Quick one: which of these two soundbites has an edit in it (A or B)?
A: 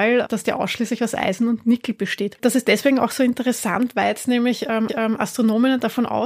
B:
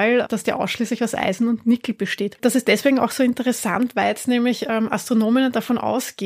A